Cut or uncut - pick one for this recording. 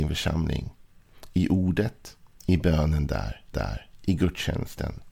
cut